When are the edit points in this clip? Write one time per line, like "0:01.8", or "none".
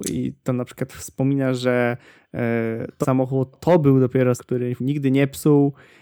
0:03.0
0:03.5
0:04.4
0:04.8